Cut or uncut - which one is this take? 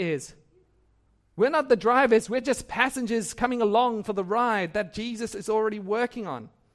uncut